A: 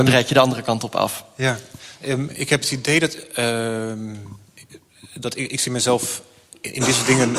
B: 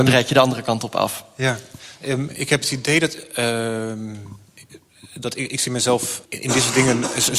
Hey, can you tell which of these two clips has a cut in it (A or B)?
B